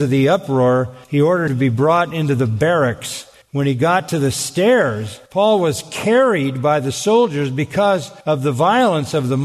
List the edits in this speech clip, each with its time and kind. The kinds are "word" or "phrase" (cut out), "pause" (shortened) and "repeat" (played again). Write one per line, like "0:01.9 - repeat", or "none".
0:01.0 - pause
0:01.5 - word
0:03.4 - pause
0:05.3 - pause
0:08.2 - pause